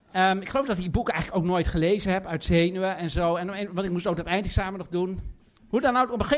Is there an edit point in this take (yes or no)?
no